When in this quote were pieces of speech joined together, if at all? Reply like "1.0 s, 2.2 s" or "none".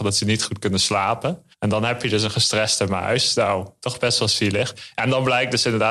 1.5 s